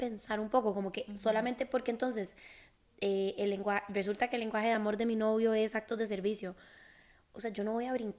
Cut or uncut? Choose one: uncut